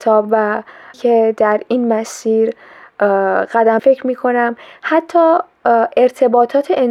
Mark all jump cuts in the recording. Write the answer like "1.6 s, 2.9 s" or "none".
0.9 s, 3.8 s